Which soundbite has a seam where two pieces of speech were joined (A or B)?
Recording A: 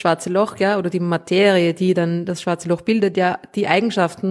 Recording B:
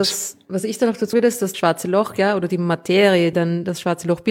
B